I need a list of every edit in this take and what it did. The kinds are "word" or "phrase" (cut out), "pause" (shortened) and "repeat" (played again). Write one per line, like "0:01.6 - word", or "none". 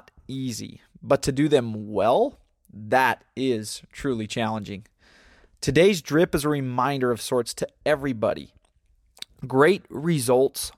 none